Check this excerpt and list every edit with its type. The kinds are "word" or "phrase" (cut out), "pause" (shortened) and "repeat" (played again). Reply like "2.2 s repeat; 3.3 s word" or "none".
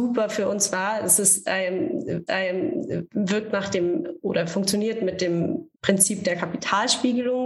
2.3 s repeat; 5.7 s pause